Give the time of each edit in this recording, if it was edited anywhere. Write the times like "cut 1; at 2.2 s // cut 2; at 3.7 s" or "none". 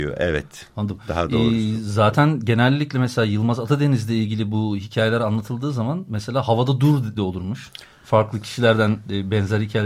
cut 1; at 7.2 s